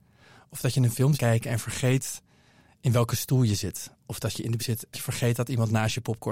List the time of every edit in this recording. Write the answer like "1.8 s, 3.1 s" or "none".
1.1 s, 4.6 s, 4.9 s